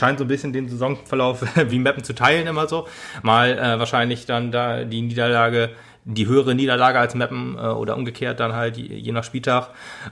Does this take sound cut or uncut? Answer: uncut